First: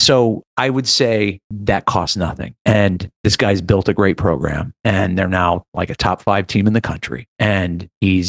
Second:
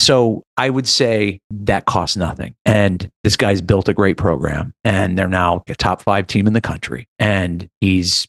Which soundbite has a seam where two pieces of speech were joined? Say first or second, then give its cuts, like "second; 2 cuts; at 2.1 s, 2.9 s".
second; 1 cut; at 5.7 s